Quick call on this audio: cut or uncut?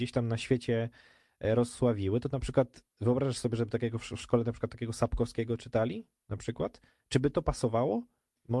uncut